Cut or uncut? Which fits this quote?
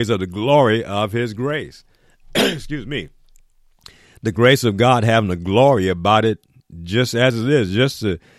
uncut